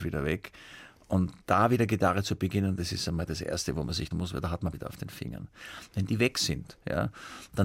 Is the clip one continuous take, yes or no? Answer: no